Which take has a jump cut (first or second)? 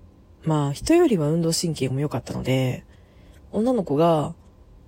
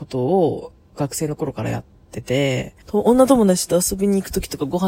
second